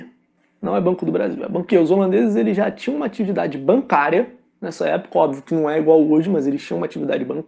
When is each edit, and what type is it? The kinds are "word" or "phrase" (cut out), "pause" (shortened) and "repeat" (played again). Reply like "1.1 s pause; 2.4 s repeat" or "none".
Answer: 1.7 s phrase